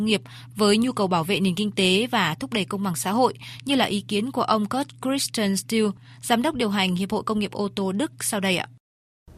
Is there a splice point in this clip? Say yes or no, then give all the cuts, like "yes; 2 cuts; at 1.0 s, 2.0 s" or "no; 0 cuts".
no; 0 cuts